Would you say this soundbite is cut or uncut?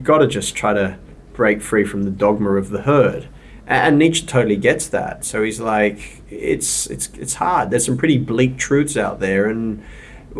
uncut